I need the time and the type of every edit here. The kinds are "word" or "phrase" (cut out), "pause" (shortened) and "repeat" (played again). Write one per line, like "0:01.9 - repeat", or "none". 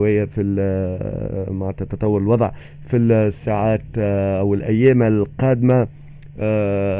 none